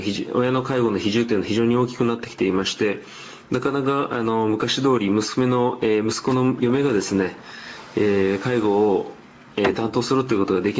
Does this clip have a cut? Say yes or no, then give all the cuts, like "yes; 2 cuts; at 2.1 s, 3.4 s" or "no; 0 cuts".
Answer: no; 0 cuts